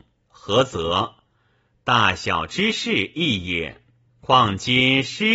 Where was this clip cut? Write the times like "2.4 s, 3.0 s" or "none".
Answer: 4.0 s